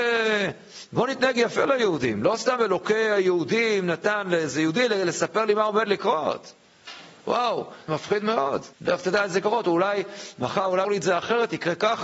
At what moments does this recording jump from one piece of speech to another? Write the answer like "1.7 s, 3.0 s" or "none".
7.9 s, 8.7 s, 10.8 s